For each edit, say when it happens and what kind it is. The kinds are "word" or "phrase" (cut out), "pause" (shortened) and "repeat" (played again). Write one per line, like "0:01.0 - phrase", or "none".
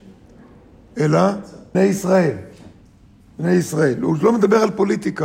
0:01.7 - word